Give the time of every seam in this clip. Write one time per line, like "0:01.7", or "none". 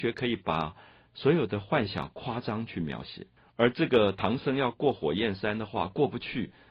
0:03.4